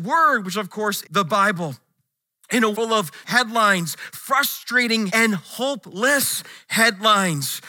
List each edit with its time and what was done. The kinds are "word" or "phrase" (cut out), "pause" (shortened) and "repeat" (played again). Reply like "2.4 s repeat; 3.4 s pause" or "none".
1.0 s word; 2.7 s word; 3.2 s word; 5.1 s word